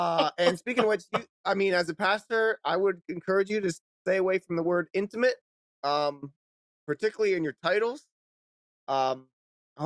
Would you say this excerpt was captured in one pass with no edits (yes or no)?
yes